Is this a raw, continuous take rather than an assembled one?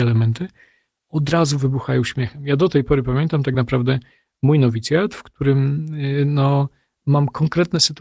yes; 0 cuts

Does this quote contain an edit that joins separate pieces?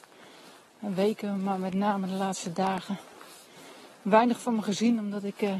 no; 0 cuts

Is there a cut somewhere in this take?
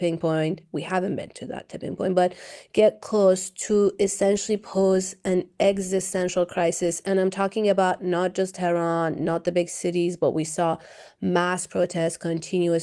no; 0 cuts

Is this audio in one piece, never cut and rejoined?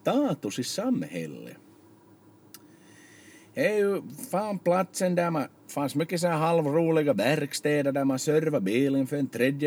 yes; 0 cuts

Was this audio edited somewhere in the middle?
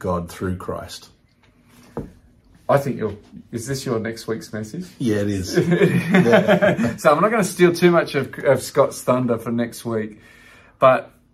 no; 0 cuts

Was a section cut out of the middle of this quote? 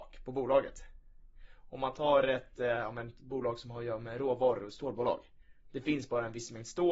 no; 0 cuts

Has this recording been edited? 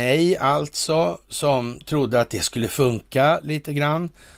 no; 0 cuts

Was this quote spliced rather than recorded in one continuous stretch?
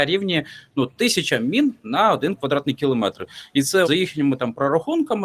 yes; 1 cut; at 3.8 s

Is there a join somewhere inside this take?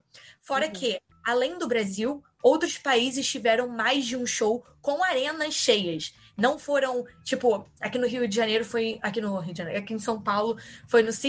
no; 0 cuts

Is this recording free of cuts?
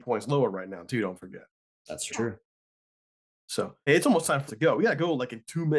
no; 3 cuts; at 2.1 s, 3.9 s, 4.5 s

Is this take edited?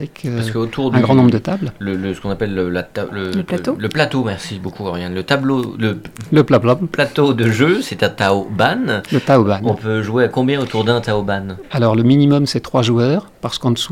no; 0 cuts

